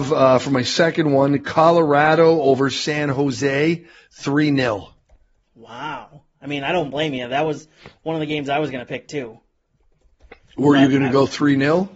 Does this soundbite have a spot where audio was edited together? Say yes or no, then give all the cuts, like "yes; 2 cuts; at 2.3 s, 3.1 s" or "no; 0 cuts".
no; 0 cuts